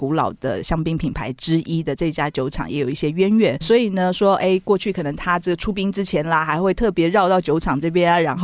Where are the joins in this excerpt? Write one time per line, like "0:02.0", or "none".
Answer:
0:03.6